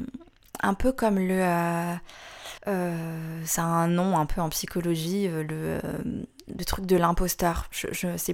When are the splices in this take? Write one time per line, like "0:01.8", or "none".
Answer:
0:02.6